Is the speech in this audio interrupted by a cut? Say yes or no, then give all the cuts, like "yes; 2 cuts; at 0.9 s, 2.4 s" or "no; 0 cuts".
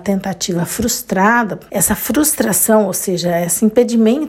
no; 0 cuts